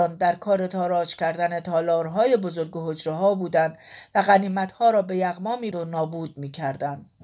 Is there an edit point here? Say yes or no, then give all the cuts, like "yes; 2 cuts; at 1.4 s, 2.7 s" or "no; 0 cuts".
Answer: yes; 1 cut; at 5.7 s